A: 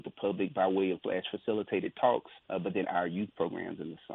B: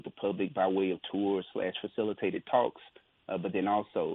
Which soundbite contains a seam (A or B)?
A